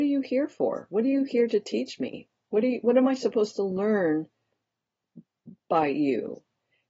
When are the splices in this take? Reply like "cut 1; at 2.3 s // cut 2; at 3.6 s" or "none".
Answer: none